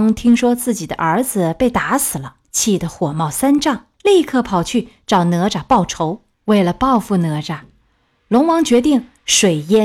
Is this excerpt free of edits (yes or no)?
no